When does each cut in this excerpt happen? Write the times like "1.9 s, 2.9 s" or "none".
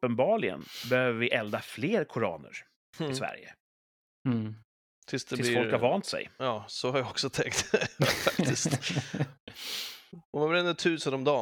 none